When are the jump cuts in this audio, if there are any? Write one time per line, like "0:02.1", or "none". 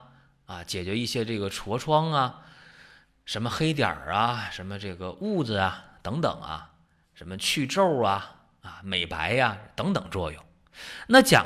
none